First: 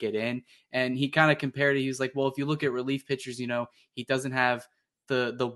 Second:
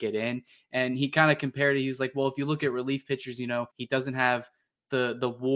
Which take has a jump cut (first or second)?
second